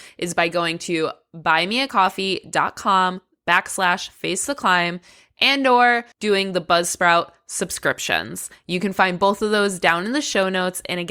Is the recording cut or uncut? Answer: cut